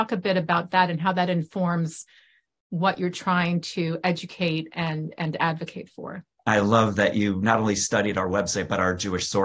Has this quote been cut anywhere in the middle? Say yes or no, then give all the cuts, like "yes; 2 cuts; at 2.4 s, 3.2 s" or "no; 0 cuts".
no; 0 cuts